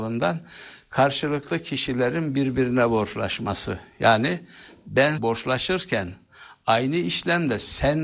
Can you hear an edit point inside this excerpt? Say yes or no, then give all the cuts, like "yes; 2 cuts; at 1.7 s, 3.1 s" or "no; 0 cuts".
yes; 1 cut; at 5.2 s